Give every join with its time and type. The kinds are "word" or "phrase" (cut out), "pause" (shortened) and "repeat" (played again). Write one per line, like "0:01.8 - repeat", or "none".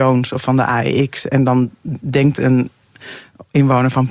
none